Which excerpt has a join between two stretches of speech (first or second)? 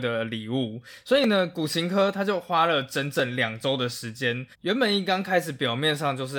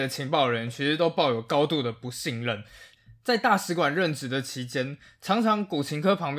first